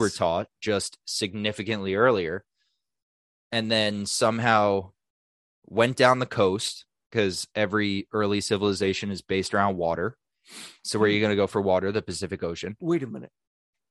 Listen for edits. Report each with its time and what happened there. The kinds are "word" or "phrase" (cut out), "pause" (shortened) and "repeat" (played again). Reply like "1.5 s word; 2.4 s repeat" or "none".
10.8 s pause